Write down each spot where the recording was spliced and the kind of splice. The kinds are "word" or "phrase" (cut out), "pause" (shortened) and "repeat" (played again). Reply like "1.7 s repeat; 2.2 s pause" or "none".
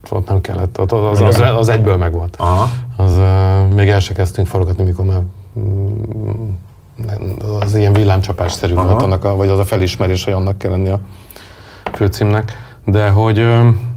none